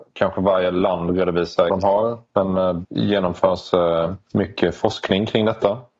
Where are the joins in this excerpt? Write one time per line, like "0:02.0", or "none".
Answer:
0:01.7
0:02.8
0:04.2